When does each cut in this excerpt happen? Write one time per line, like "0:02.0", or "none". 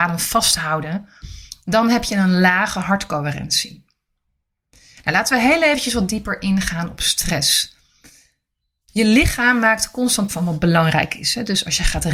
0:10.3